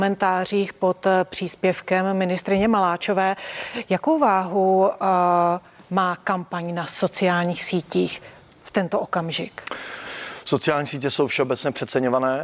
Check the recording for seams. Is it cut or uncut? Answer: uncut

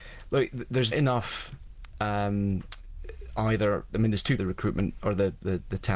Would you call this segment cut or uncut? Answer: cut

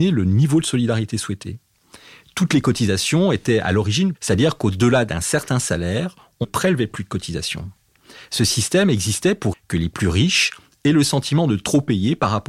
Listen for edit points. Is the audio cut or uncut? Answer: cut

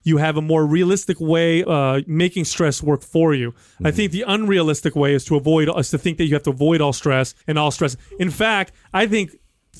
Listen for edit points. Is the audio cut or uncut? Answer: cut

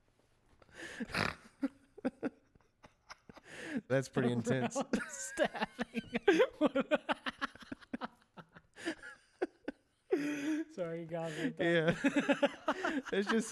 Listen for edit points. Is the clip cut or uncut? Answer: cut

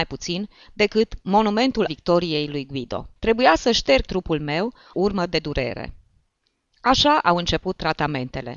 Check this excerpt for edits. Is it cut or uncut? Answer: cut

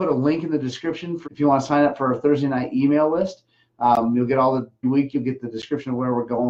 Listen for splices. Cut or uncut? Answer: cut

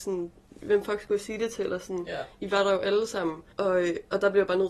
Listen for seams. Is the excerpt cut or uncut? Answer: cut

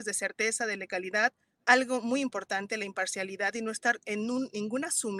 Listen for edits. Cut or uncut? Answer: uncut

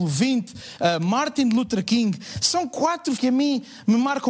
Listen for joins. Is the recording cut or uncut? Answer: cut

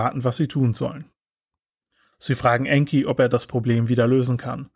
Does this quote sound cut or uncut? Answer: uncut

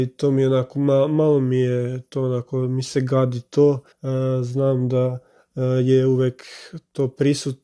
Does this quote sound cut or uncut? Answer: cut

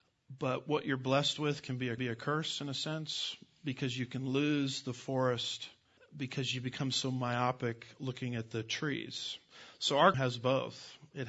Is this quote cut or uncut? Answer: cut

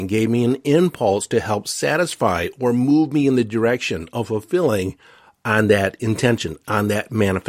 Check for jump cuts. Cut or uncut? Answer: uncut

